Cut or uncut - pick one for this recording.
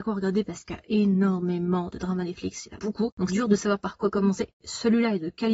cut